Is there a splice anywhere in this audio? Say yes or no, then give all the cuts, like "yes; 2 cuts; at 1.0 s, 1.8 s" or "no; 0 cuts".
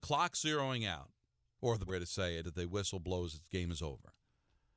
yes; 3 cuts; at 1.3 s, 1.9 s, 2.4 s